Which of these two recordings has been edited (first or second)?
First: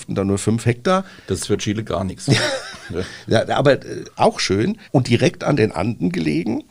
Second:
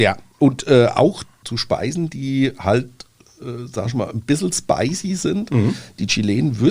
first